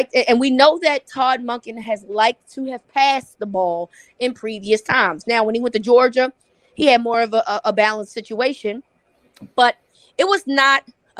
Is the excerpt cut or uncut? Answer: uncut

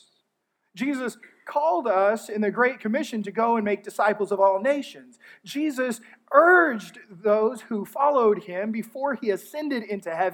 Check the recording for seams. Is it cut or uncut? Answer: uncut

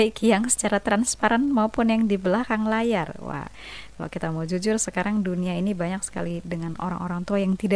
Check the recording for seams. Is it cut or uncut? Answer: uncut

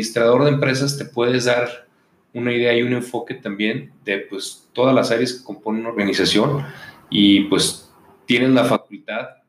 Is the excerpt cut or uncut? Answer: uncut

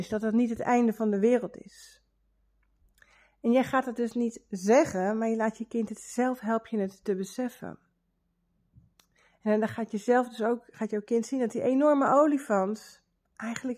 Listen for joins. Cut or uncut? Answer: uncut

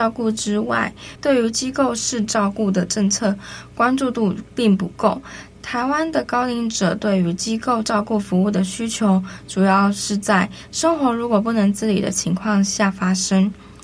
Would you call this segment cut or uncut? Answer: cut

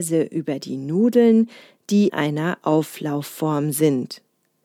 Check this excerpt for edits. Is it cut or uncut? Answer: cut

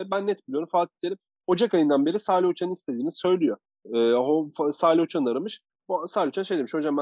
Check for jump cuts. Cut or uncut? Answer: uncut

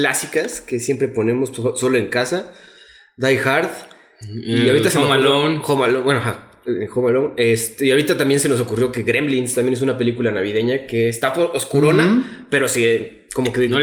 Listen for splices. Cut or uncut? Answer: uncut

